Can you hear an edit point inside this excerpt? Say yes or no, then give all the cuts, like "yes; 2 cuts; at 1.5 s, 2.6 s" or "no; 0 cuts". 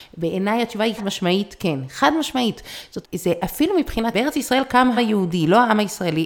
yes; 4 cuts; at 1.0 s, 3.0 s, 4.1 s, 5.0 s